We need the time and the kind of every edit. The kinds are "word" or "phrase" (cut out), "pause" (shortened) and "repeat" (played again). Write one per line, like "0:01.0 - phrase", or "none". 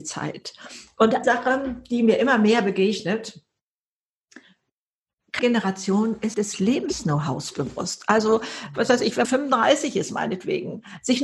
0:01.2 - word
0:05.4 - word
0:06.3 - word
0:09.2 - word